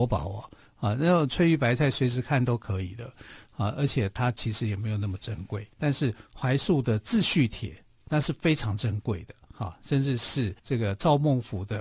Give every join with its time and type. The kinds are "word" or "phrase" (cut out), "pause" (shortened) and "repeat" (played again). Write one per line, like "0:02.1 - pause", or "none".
0:05.7 - pause
0:10.6 - pause